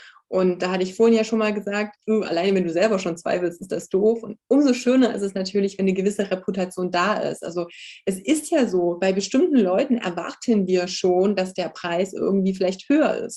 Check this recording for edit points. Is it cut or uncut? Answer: uncut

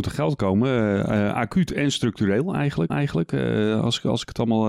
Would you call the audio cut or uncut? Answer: cut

